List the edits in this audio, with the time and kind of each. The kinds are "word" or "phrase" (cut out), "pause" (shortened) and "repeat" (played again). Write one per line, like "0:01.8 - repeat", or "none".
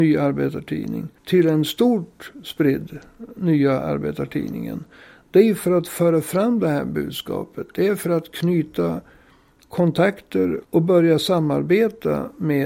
0:01.2 - pause
0:10.6 - pause